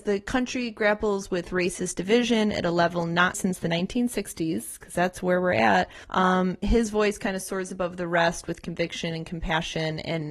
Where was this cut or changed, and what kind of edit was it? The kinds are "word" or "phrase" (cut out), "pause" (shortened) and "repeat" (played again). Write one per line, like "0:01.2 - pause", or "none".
0:03.3 - word
0:06.0 - pause